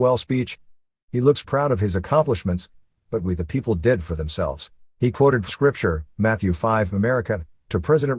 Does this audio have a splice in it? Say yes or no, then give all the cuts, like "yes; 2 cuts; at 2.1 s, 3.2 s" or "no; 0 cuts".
yes; 3 cuts; at 1.4 s, 4.9 s, 5.5 s